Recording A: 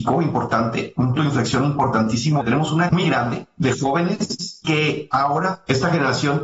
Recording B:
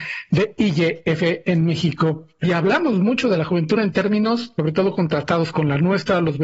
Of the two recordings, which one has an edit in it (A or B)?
A